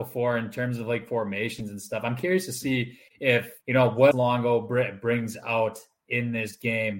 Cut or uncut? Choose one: cut